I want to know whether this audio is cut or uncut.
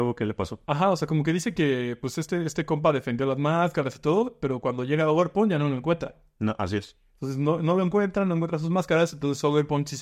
uncut